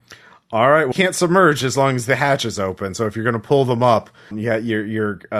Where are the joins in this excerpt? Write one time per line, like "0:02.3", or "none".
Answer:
0:00.9
0:04.3